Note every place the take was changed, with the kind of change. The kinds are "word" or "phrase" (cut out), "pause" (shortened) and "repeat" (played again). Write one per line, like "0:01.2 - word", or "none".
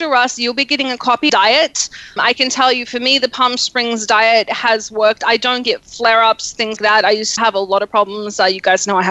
0:01.3 - phrase
0:02.2 - word
0:06.8 - word
0:07.4 - word